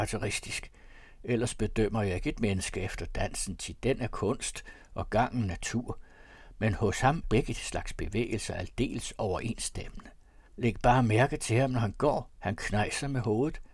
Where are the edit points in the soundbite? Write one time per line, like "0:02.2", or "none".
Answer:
0:07.2
0:10.5
0:12.3